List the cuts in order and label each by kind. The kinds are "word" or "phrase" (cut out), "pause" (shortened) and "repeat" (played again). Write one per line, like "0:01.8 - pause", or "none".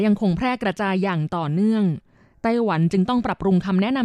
none